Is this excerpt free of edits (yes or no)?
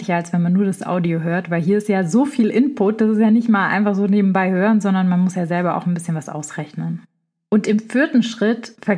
yes